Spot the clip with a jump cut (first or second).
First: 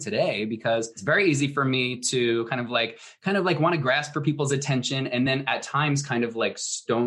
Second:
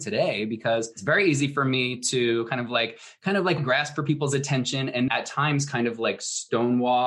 second